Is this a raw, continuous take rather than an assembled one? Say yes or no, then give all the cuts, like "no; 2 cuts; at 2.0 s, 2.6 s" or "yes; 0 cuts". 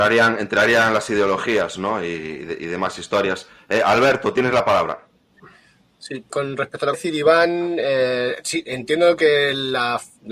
no; 2 cuts; at 6.3 s, 6.9 s